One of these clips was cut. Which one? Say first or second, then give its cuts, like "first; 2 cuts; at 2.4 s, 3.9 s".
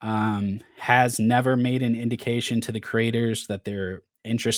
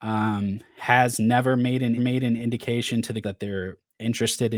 second; 2 cuts; at 2.0 s, 3.2 s